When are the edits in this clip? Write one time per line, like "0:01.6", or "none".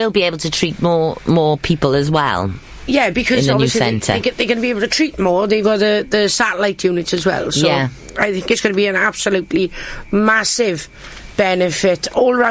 0:05.6